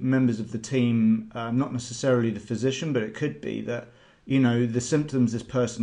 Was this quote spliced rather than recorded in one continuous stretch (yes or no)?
no